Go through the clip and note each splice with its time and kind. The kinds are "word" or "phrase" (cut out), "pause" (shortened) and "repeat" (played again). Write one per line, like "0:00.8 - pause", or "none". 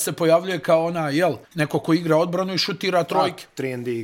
0:01.4 - pause